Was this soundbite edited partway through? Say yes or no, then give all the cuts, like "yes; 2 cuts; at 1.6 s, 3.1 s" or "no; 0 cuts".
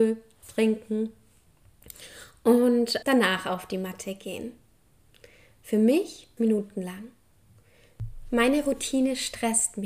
yes; 2 cuts; at 3.0 s, 6.4 s